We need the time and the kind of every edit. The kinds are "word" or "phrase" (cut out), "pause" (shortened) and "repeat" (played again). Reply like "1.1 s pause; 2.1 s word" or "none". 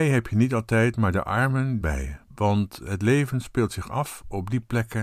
1.8 s phrase; 2.2 s pause